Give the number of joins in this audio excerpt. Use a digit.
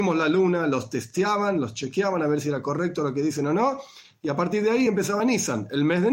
0